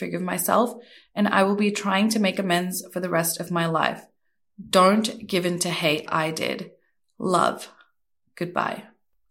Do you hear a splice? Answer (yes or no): yes